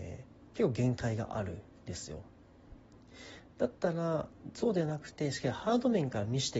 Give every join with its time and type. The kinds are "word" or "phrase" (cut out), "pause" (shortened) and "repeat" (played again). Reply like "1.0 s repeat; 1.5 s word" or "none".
none